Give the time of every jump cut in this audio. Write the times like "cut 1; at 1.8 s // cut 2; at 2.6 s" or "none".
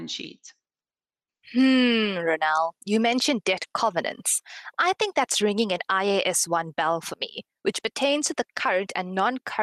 none